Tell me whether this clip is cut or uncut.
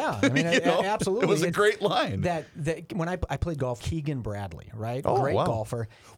cut